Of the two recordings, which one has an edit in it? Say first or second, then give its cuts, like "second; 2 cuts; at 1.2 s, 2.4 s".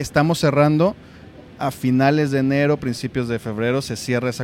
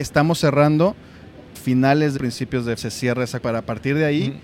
second; 4 cuts; at 1.5 s, 2.2 s, 2.8 s, 3.4 s